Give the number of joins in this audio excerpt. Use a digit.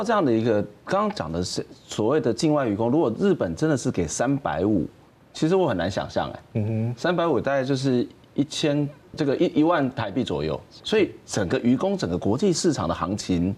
3